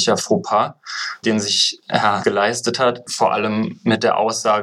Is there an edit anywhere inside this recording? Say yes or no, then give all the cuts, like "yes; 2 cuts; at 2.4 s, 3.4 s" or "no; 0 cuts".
yes; 2 cuts; at 1.2 s, 2.2 s